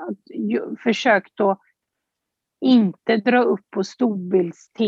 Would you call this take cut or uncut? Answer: uncut